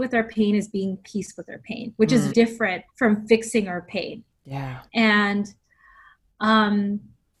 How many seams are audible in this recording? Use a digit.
4